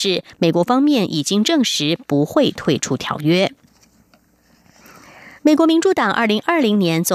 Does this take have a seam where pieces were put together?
yes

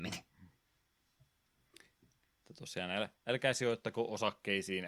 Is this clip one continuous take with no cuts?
no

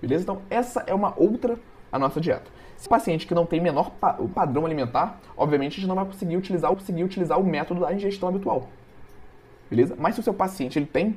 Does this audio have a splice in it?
yes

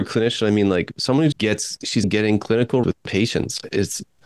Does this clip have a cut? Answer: yes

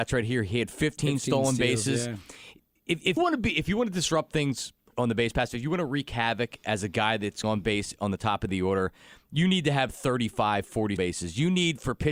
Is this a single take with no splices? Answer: no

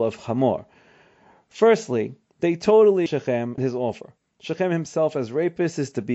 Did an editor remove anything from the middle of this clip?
yes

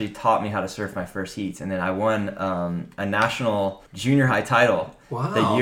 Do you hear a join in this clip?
yes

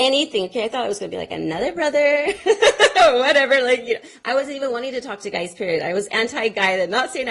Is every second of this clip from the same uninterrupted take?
yes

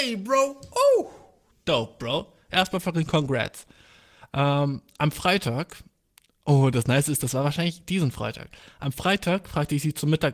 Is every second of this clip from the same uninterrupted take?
yes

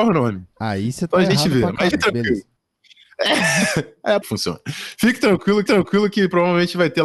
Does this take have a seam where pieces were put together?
yes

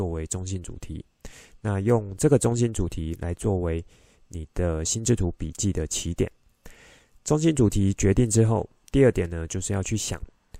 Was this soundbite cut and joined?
no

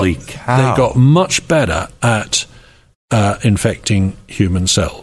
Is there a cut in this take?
no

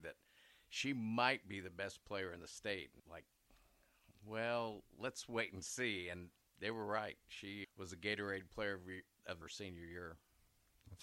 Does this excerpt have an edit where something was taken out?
yes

